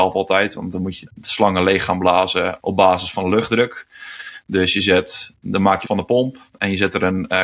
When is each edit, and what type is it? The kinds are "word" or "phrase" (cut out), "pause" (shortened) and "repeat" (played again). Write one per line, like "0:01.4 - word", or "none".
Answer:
0:01.1 - word
0:02.6 - word
0:05.9 - phrase